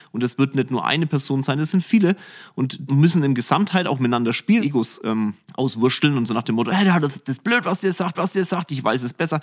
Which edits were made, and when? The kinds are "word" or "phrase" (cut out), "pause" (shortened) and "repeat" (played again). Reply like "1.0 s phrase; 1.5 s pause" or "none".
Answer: 2.9 s word; 4.6 s phrase; 5.4 s pause; 8.1 s repeat